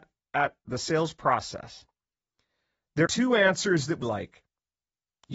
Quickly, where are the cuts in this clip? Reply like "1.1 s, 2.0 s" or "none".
3.0 s, 4.0 s